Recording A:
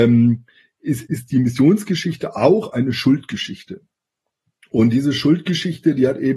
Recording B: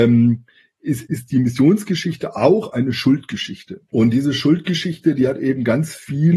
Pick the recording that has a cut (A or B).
B